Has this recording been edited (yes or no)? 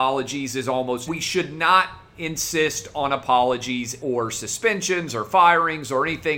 yes